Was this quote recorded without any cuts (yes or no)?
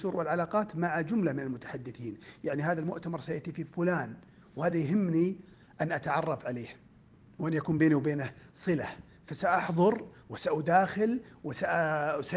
yes